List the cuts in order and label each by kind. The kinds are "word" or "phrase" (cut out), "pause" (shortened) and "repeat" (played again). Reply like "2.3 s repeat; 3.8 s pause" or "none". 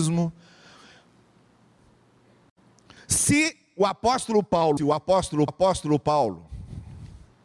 4.8 s word; 5.5 s repeat